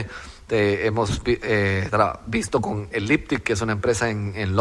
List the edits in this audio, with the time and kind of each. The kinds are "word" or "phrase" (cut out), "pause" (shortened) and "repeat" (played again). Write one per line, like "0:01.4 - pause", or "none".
none